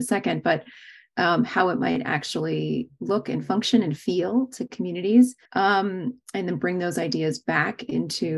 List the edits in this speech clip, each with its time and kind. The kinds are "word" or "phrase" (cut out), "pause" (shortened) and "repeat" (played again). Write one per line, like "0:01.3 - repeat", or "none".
0:05.5 - pause